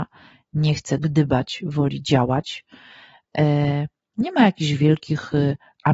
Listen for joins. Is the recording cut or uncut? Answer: uncut